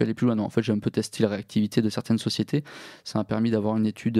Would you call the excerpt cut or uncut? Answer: cut